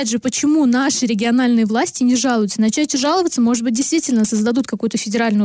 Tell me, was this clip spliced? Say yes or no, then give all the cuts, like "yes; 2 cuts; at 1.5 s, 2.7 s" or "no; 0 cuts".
no; 0 cuts